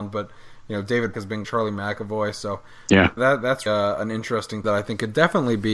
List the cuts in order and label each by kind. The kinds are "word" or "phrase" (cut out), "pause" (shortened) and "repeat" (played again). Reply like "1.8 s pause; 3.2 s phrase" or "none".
1.1 s word; 1.4 s word; 3.2 s word; 3.7 s word; 4.6 s word